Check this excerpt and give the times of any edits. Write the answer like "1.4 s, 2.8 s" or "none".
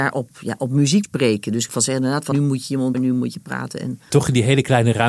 1.0 s, 1.7 s, 2.3 s, 2.9 s, 4.1 s